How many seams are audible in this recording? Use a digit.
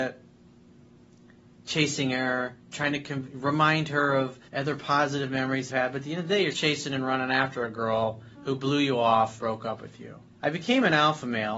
7